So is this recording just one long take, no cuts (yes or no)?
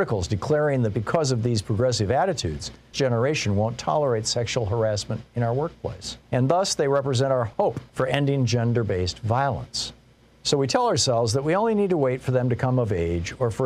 no